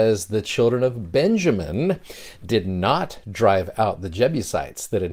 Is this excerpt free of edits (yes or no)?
yes